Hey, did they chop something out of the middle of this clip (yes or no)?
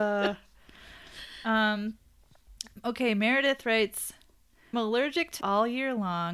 yes